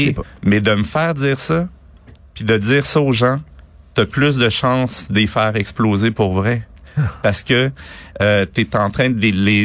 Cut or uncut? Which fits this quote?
uncut